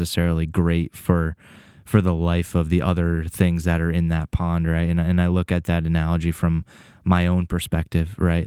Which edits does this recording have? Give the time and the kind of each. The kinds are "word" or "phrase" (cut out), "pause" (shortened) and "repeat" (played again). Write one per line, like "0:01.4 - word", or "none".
none